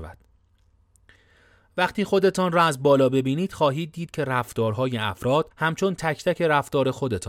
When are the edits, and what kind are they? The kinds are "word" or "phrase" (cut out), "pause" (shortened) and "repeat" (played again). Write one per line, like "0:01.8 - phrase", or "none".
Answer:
0:05.5 - pause